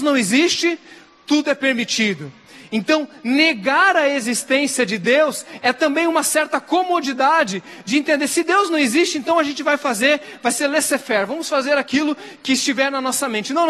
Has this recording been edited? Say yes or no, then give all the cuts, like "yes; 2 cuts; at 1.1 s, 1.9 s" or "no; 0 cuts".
no; 0 cuts